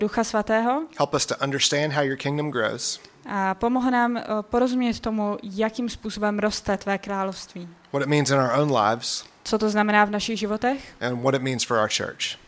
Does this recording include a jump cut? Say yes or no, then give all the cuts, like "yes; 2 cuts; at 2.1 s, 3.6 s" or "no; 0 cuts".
no; 0 cuts